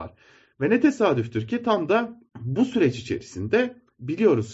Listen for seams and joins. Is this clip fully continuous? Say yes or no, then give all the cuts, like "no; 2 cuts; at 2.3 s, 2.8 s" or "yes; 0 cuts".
no; 1 cut; at 2.3 s